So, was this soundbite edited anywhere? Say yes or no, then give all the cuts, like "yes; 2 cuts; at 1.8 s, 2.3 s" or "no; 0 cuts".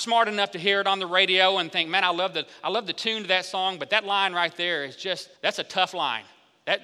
yes; 1 cut; at 5.4 s